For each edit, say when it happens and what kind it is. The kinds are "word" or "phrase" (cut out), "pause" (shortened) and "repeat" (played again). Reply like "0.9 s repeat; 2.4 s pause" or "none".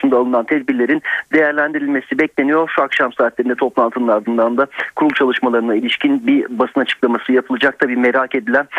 none

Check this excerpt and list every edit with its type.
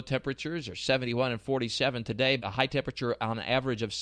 2.4 s word

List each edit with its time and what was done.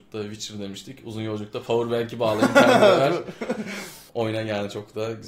4.1 s pause

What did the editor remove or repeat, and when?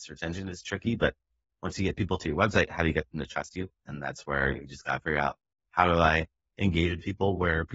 5.5 s pause

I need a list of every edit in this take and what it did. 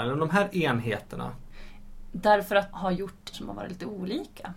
2.7 s word; 3.3 s word

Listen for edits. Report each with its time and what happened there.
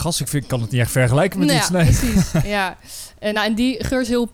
none

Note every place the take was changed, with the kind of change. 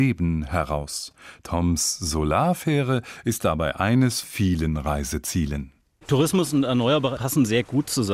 4.2 s word; 7.2 s word

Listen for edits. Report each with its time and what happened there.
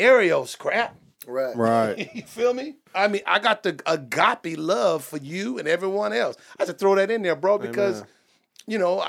2.9 s pause; 6.7 s word

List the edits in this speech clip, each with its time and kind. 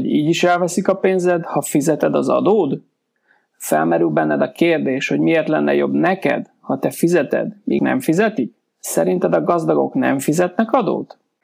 7.8 s word; 8.7 s pause

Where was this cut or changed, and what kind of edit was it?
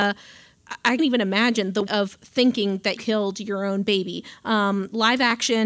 1.0 s word; 1.9 s word; 3.0 s word

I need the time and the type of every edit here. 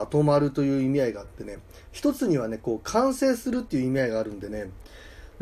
none

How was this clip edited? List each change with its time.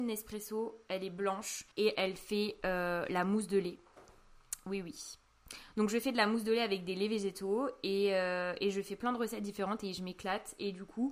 1.7 s pause

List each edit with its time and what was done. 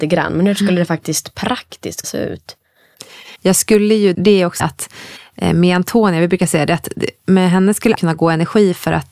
2.0 s word; 3.4 s pause; 4.1 s phrase; 4.6 s phrase; 7.9 s word

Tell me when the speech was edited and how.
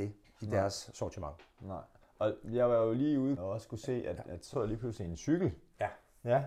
2.0 s pause; 3.4 s word; 4.5 s word

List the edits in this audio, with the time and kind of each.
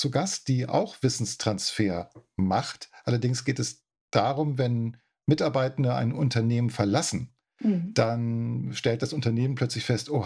none

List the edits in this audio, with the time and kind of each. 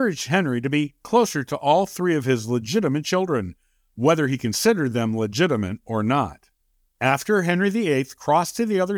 none

